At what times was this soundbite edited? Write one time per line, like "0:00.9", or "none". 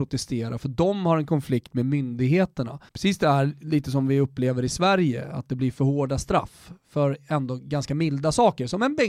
0:02.9